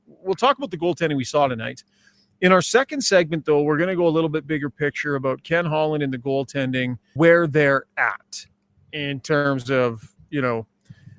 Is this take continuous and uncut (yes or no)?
no